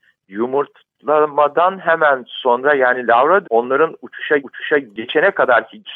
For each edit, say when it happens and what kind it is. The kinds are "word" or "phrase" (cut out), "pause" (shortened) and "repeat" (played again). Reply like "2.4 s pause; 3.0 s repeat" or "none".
3.4 s word; 4.4 s repeat